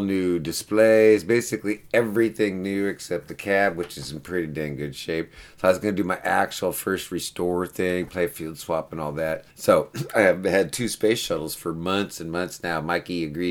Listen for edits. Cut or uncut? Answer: cut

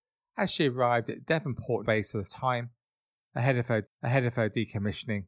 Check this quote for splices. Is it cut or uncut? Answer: cut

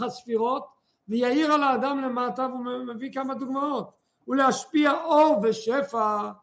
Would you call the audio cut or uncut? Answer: uncut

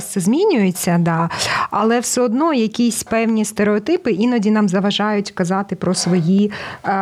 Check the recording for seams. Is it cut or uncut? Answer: uncut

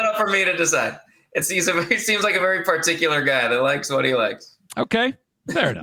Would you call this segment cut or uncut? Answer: uncut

